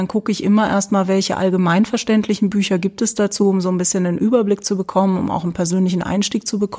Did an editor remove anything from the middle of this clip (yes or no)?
no